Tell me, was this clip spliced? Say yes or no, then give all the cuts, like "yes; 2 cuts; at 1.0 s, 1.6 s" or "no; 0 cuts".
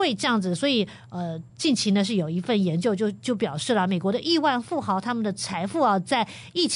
yes; 1 cut; at 1.5 s